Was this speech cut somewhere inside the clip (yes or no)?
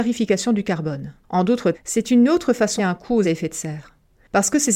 yes